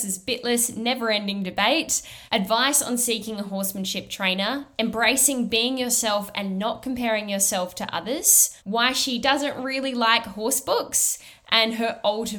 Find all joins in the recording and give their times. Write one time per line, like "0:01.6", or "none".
0:02.3
0:08.6

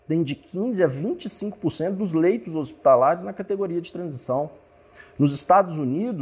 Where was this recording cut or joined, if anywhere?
none

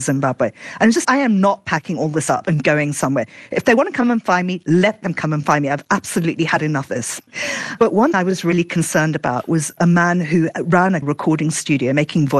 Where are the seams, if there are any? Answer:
0:01.0
0:06.9
0:08.1
0:11.0

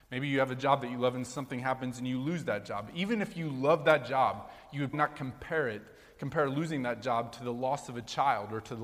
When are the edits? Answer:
0:04.9

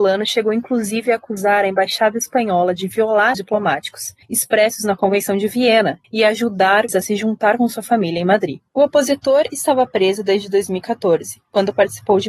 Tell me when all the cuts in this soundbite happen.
0:03.3
0:04.2
0:06.0
0:06.9
0:08.7

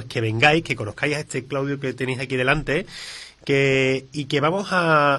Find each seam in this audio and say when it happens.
none

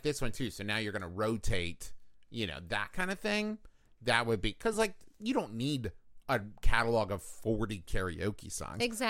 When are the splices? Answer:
none

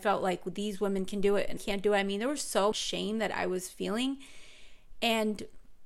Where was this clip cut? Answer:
0:01.6
0:02.7

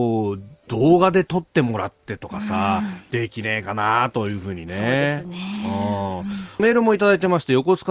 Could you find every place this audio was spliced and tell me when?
0:06.6

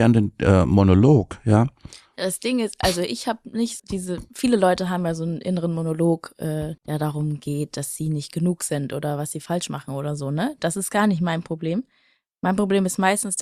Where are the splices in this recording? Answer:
0:03.8
0:06.8

